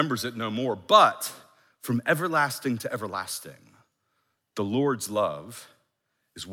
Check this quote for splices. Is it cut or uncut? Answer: uncut